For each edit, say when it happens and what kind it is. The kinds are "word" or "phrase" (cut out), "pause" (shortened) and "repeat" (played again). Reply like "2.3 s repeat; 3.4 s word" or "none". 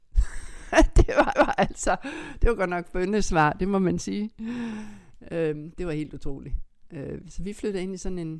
1.3 s repeat